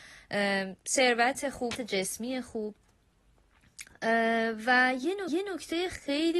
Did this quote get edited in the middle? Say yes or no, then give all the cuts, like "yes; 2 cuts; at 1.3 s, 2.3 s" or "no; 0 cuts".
yes; 2 cuts; at 1.7 s, 5.3 s